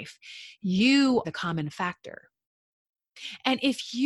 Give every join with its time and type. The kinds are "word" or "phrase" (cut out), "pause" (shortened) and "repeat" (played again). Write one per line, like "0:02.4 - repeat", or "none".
0:01.2 - word